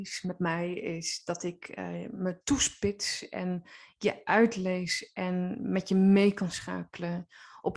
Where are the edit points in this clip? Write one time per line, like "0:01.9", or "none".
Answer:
none